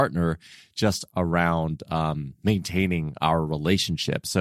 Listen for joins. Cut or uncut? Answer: uncut